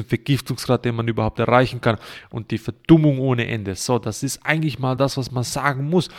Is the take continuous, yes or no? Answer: yes